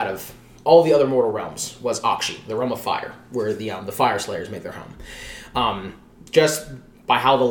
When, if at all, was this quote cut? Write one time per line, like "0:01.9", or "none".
none